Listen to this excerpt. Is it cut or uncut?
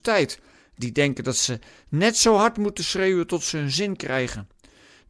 uncut